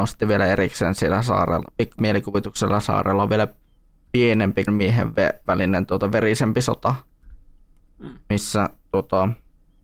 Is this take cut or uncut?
cut